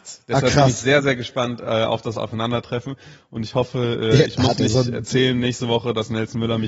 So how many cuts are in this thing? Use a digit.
0